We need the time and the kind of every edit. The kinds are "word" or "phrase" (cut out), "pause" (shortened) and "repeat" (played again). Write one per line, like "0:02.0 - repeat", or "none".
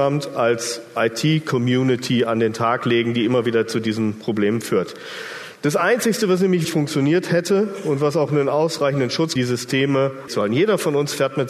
0:06.6 - word
0:09.4 - phrase
0:10.3 - word